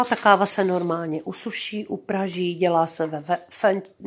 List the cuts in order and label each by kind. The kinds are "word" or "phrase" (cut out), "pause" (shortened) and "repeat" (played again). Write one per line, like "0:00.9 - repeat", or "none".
none